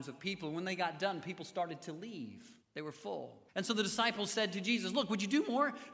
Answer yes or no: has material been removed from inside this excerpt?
yes